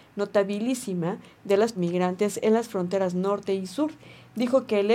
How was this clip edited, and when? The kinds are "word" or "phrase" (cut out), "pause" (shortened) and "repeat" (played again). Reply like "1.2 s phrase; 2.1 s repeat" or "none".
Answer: 1.8 s word